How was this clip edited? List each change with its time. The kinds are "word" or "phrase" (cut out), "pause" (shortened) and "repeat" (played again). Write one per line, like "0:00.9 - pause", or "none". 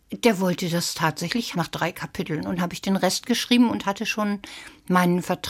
0:01.5 - word
0:02.6 - word